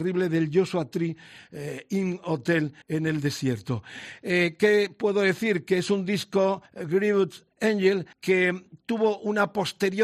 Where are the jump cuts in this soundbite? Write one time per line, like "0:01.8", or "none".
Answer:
0:02.8
0:06.7
0:08.1